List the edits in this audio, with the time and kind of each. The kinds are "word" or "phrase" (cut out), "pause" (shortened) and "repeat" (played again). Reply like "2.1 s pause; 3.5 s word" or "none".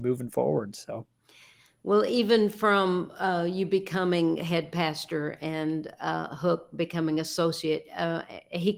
none